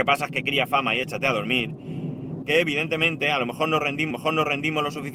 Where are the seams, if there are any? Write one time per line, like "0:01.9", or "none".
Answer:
0:02.4
0:04.1